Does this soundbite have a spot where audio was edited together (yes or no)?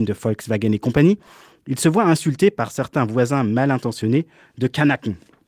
no